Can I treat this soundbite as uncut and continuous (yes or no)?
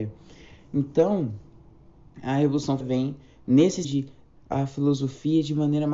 no